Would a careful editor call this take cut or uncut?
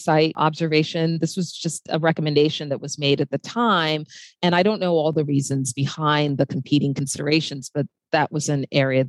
uncut